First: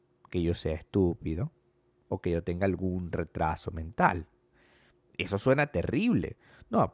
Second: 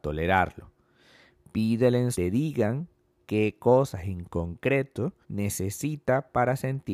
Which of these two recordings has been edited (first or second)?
second